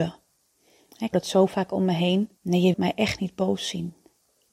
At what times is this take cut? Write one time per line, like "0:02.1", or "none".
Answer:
0:01.1
0:02.4
0:02.7